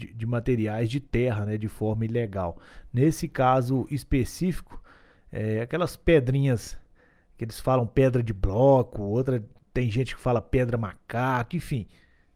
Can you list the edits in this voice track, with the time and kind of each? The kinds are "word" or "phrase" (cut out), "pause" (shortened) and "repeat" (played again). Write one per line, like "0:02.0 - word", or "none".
none

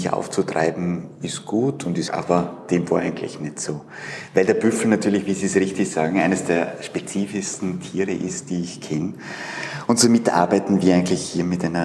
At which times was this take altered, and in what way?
0:02.1 - word

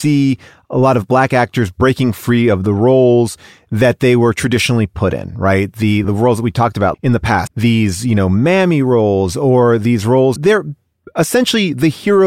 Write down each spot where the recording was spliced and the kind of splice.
0:06.0 - word
0:06.9 - word
0:07.5 - word
0:10.4 - word

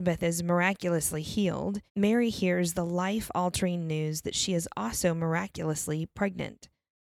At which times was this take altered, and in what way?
0:01.9 - pause

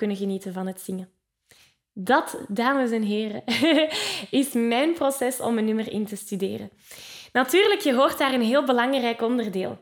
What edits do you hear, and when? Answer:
none

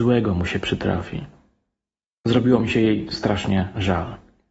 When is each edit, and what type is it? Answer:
none

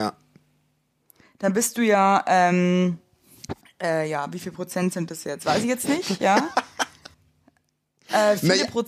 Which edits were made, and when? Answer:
0:03.6 - pause
0:07.1 - pause

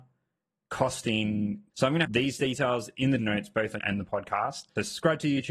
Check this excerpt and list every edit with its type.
0:01.7 - word
0:02.0 - word
0:03.2 - word
0:03.8 - word

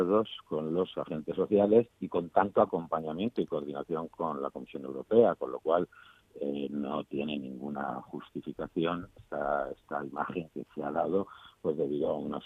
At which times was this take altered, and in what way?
0:01.9 - pause
0:09.2 - word
0:10.5 - word

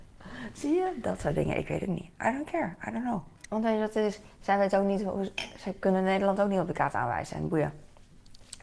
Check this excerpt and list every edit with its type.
0:03.4 - pause

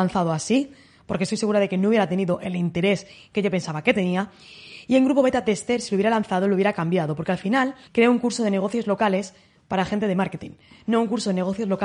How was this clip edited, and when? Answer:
0:07.9 - pause

